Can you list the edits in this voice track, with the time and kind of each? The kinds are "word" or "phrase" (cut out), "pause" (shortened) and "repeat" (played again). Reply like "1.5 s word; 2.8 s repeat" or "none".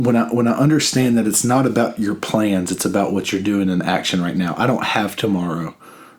none